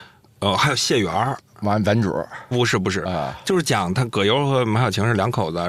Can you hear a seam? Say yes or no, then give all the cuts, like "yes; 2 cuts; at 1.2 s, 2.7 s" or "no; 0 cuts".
yes; 1 cut; at 2.5 s